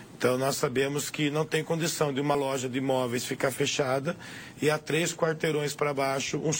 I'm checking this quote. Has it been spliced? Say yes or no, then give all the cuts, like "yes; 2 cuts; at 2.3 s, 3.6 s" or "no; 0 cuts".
no; 0 cuts